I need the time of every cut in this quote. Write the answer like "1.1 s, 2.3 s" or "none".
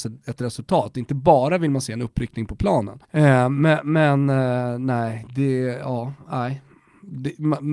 3.0 s